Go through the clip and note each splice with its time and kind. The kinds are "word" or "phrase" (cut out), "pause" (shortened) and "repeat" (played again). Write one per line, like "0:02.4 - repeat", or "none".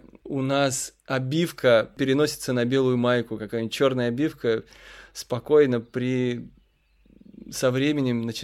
none